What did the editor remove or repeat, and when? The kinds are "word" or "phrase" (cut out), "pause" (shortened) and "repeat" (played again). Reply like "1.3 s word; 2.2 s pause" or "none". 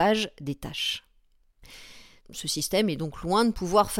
none